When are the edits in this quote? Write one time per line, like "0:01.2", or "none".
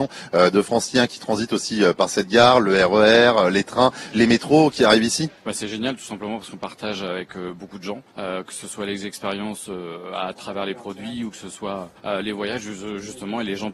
0:04.1
0:05.4
0:08.1
0:12.0